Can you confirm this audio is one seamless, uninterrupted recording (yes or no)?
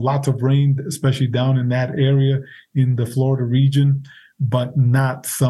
yes